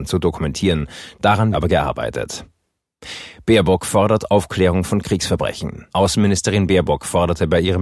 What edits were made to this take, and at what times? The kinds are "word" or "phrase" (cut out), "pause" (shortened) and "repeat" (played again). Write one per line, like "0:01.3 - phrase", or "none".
0:01.5 - word
0:05.9 - pause